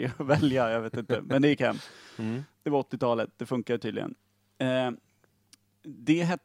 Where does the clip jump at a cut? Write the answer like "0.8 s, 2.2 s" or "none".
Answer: none

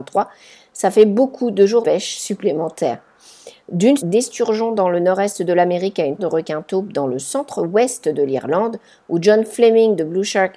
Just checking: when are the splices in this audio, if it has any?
1.8 s, 4.0 s, 6.2 s

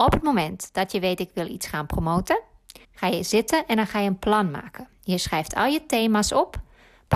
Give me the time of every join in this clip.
2.8 s

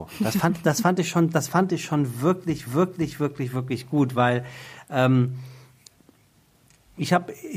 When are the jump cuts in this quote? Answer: 2.7 s

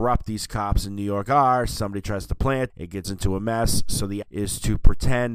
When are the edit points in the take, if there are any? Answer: 2.7 s, 3.0 s, 4.2 s

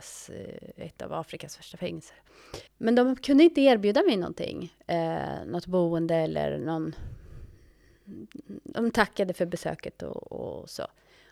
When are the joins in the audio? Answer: 2.7 s

